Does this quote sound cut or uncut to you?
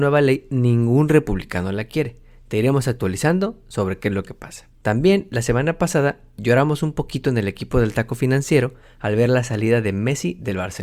uncut